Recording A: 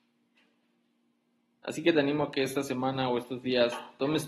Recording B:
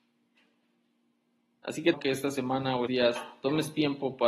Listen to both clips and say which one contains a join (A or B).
B